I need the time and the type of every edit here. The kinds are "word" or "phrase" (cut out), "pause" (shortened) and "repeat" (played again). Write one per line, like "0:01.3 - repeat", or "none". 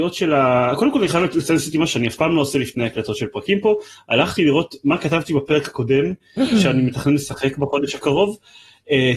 none